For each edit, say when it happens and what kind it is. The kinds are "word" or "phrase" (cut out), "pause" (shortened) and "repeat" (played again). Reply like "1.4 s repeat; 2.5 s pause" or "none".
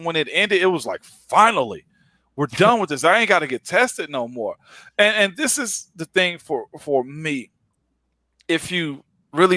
none